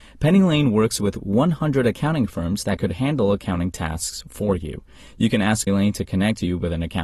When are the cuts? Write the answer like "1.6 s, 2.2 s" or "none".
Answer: 5.7 s